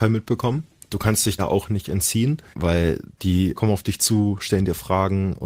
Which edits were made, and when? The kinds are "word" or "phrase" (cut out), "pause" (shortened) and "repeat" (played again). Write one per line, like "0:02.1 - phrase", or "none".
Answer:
0:01.4 - word
0:02.5 - word
0:03.6 - word